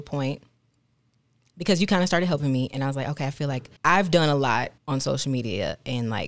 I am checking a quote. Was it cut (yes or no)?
yes